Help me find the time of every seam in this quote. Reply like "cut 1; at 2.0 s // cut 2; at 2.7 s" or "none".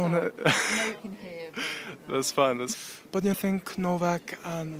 cut 1; at 1.0 s // cut 2; at 2.7 s // cut 3; at 3.3 s